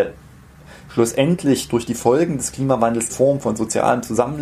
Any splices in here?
yes; 1 cut; at 3.1 s

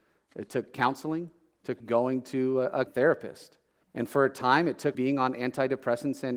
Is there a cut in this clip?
yes; 4 cuts; at 1.8 s, 2.9 s, 3.8 s, 4.9 s

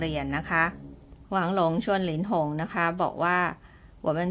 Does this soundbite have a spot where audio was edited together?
yes; 1 cut; at 1.2 s

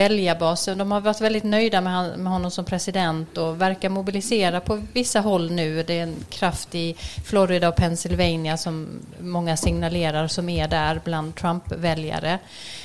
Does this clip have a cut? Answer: no; 0 cuts

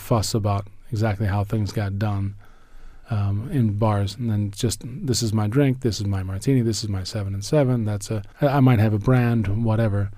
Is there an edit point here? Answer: yes; 2 cuts; at 3.0 s, 8.3 s

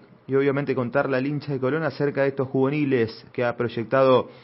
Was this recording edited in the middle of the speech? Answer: yes; 1 cut; at 3.3 s

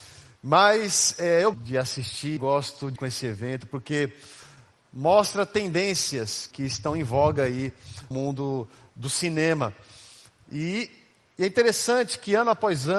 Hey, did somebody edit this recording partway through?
yes; 5 cuts; at 1.5 s, 2.4 s, 3.0 s, 6.5 s, 8.1 s

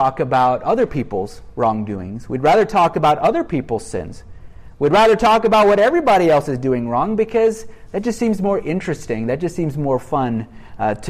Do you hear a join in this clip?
no; 0 cuts

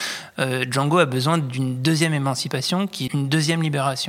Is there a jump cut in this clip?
yes; 1 cut; at 3.1 s

